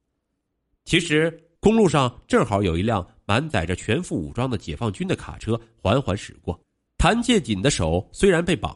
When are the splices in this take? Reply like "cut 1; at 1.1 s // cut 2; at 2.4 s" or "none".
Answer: cut 1; at 1.6 s // cut 2; at 6.9 s